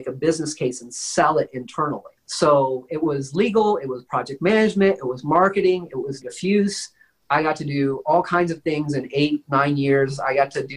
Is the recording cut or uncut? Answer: cut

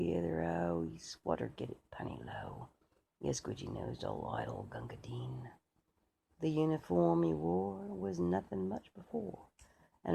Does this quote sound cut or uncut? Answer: uncut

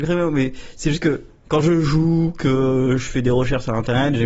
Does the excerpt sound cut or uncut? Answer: uncut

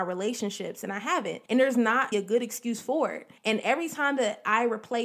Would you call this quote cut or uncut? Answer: cut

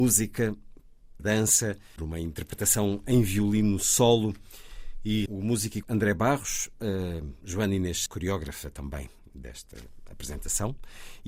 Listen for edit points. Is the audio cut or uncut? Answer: cut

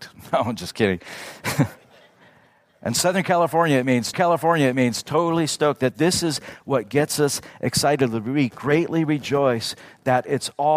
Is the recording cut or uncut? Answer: cut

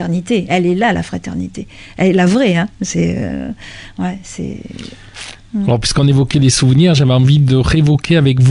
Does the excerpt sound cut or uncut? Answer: uncut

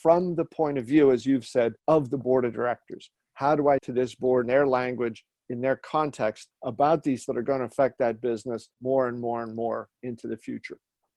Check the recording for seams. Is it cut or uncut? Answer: cut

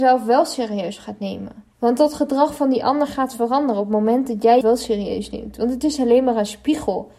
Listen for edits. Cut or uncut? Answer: cut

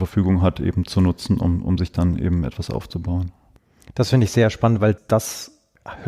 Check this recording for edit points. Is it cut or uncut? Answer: uncut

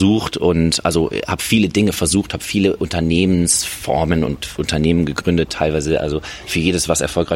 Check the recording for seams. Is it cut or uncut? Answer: uncut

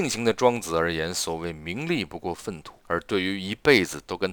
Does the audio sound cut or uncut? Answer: cut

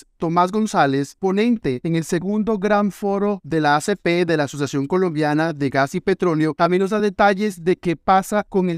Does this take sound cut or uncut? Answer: uncut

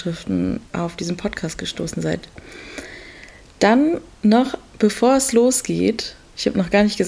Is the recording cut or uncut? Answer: uncut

